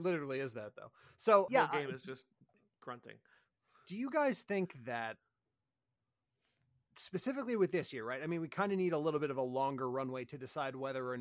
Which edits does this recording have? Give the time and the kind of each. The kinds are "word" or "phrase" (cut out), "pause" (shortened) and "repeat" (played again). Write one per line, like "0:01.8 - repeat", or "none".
0:01.5 - word